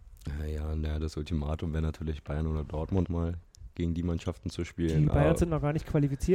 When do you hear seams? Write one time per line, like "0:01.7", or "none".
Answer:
0:03.1